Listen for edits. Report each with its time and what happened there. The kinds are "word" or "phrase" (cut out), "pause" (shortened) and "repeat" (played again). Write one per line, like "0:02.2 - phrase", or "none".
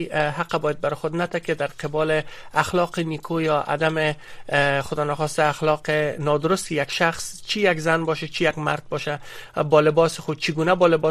none